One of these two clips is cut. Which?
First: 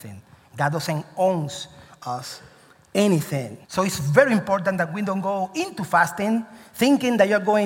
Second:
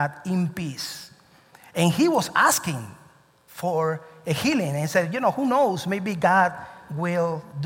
first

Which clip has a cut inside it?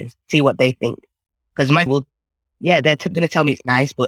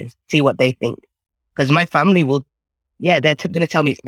first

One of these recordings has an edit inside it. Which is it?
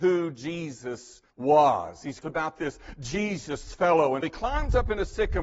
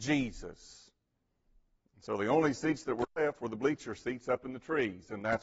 first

